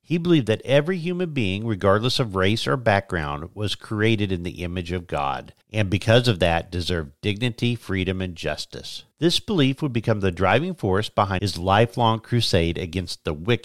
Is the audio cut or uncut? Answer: cut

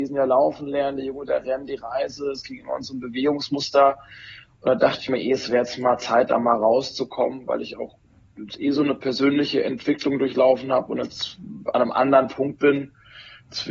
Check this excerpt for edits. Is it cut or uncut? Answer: uncut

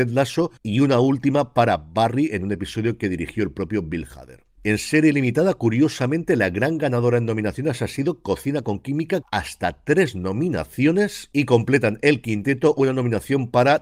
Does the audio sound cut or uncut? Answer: cut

